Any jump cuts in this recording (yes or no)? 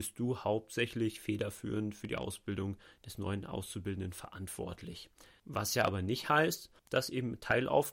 no